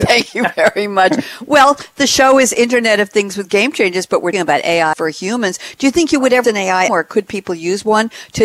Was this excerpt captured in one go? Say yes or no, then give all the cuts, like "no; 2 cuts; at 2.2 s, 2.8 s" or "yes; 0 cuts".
no; 4 cuts; at 4.3 s, 4.9 s, 6.4 s, 6.9 s